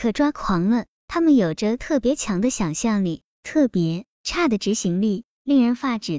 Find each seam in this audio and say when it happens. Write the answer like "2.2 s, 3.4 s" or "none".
4.1 s